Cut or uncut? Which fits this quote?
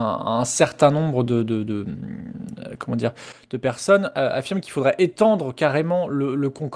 uncut